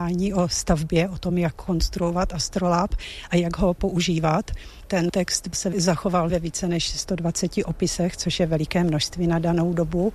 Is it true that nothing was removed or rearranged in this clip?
yes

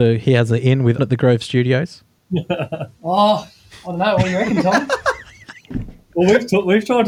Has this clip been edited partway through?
yes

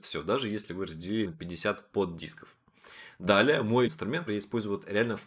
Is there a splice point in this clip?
yes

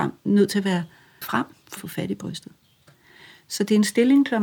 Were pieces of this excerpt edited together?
yes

